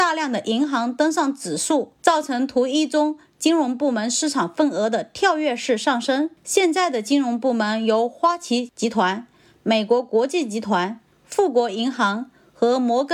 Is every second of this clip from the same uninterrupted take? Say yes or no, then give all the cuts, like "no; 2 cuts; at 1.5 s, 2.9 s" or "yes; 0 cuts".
no; 3 cuts; at 2.0 s, 6.4 s, 11.1 s